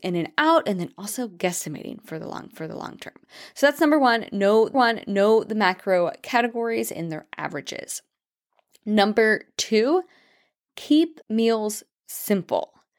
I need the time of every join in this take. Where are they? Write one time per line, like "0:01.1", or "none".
0:02.5
0:04.7
0:11.2